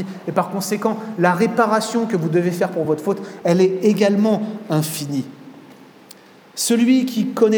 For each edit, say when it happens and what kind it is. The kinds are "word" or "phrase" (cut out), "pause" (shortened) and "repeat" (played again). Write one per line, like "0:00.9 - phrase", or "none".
none